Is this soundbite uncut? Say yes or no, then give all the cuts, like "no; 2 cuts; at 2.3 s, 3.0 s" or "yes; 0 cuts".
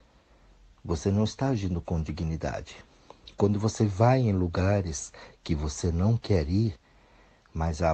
yes; 0 cuts